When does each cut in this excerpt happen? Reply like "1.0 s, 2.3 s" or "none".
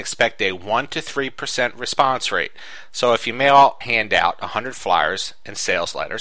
3.8 s